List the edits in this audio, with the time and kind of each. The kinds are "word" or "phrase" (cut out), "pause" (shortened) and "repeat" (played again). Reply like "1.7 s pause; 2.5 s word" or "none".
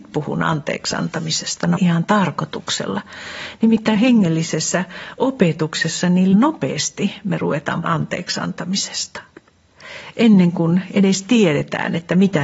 1.8 s phrase; 4.0 s word; 6.3 s word; 7.8 s word